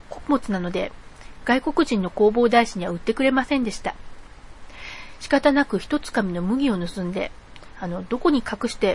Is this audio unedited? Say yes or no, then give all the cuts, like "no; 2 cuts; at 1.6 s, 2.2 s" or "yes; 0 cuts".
yes; 0 cuts